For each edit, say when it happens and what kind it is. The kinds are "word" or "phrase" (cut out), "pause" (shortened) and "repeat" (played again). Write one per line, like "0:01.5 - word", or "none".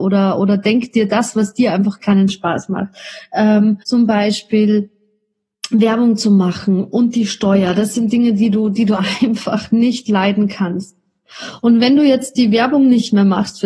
0:03.8 - pause